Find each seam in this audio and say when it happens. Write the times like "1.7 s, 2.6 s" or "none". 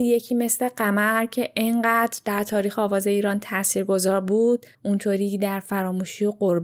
4.7 s